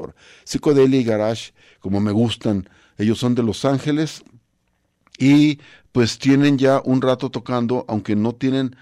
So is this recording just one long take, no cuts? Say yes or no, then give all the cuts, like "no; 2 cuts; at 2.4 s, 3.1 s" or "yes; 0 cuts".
yes; 0 cuts